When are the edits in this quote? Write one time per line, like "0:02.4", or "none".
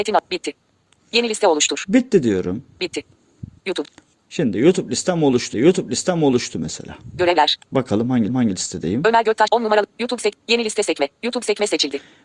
0:03.6
0:05.5
0:07.6
0:08.3
0:09.5